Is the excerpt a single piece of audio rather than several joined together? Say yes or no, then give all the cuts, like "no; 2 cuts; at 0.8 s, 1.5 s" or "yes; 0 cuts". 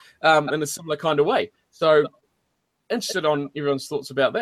yes; 0 cuts